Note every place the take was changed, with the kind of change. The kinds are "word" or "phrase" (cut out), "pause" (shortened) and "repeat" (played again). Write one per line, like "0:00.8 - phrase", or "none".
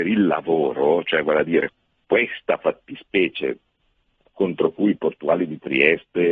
none